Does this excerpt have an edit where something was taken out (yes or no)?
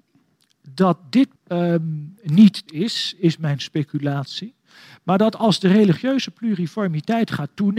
yes